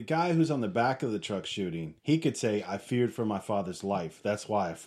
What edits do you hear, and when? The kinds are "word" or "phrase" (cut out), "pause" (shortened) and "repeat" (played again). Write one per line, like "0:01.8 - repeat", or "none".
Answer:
0:02.0 - pause